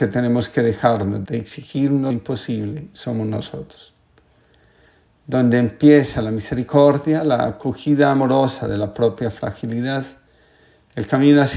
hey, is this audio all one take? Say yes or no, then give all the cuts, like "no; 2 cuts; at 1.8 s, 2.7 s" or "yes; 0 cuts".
no; 2 cuts; at 1.3 s, 2.1 s